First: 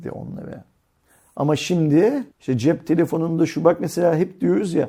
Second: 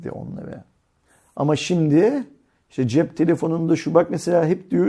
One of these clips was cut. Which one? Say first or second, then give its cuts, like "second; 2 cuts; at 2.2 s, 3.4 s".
first; 1 cut; at 2.3 s